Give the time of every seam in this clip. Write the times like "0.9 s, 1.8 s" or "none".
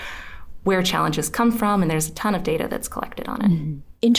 none